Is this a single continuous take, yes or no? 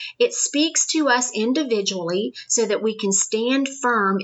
yes